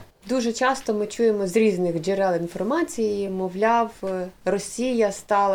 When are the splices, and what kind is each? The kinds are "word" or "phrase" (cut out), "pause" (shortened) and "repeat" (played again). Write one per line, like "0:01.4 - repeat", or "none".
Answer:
none